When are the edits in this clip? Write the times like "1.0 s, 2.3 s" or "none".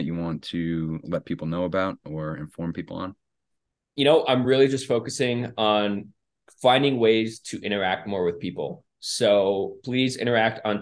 none